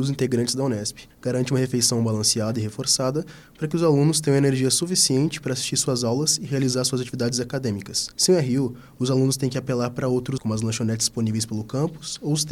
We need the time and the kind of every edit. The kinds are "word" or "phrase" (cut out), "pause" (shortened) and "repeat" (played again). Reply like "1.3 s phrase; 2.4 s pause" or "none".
1.1 s pause; 8.1 s pause; 10.4 s word